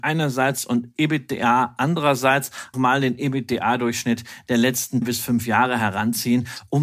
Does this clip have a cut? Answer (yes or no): yes